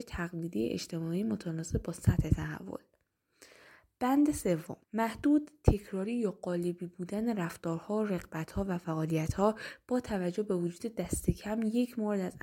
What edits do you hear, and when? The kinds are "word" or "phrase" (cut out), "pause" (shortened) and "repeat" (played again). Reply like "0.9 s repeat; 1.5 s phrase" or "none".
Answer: 4.8 s pause